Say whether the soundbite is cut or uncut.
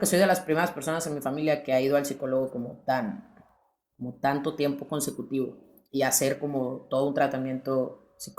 uncut